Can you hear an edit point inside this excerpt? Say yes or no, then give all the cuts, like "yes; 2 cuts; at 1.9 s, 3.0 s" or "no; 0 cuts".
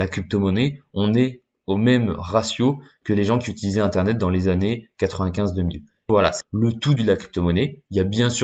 yes; 3 cuts; at 6.1 s, 6.4 s, 7.0 s